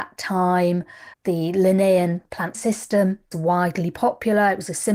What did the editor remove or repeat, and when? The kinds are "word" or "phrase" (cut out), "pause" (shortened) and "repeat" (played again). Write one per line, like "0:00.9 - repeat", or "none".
0:01.1 - pause
0:02.5 - word
0:03.3 - word